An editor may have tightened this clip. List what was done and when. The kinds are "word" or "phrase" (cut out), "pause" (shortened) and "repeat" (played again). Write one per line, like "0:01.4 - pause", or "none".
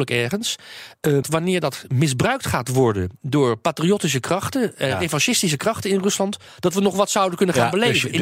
0:01.2 - word
0:06.5 - pause